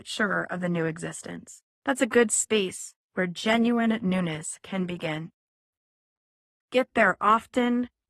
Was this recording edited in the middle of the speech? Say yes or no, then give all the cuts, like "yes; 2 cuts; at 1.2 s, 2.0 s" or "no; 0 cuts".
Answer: yes; 2 cuts; at 1.7 s, 3.0 s